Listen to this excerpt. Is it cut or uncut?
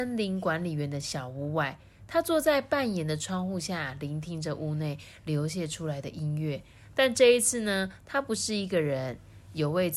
uncut